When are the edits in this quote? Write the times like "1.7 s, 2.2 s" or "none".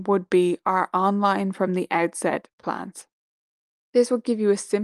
none